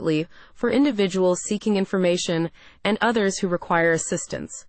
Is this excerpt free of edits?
yes; 0 cuts

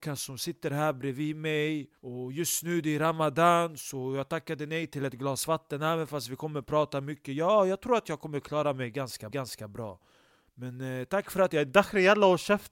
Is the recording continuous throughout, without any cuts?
no; 2 cuts; at 2.0 s, 9.3 s

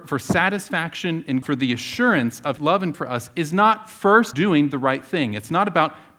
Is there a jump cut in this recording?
yes; 4 cuts; at 1.4 s, 2.6 s, 2.9 s, 4.3 s

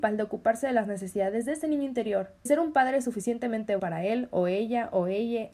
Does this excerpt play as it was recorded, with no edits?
no; 2 cuts; at 2.5 s, 3.8 s

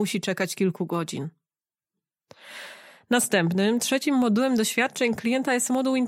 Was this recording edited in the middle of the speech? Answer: no; 0 cuts

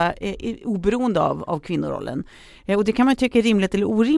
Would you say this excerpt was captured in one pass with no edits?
yes; 0 cuts

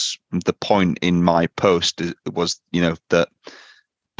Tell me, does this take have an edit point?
no; 0 cuts

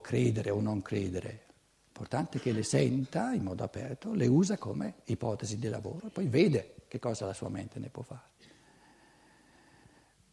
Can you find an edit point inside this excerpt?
no; 0 cuts

